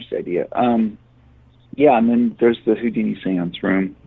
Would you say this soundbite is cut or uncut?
uncut